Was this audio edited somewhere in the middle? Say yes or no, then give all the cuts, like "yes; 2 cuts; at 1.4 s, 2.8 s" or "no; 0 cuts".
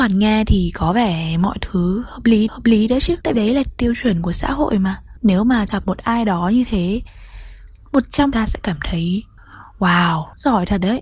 yes; 3 cuts; at 2.5 s, 3.3 s, 8.3 s